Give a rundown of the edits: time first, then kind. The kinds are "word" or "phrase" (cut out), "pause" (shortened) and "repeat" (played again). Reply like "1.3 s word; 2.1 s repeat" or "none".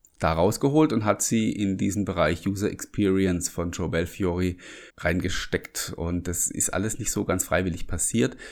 4.9 s pause